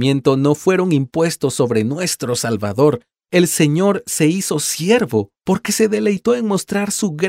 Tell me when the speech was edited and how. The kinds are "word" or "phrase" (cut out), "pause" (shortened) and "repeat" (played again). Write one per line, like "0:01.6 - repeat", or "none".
none